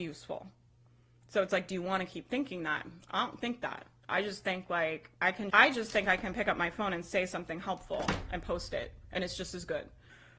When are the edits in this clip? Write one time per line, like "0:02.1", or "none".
0:05.2
0:05.5